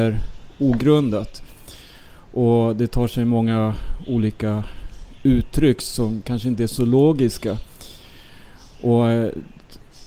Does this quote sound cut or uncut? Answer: uncut